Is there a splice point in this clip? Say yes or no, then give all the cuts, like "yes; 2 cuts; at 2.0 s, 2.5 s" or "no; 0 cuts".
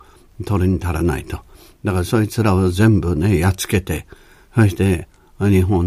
no; 0 cuts